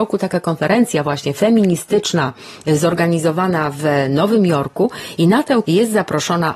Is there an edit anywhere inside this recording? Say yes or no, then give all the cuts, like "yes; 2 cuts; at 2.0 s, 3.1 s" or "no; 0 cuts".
yes; 1 cut; at 5.6 s